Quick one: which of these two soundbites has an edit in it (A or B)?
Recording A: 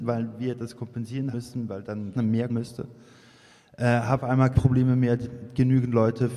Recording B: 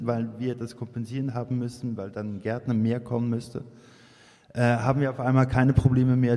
A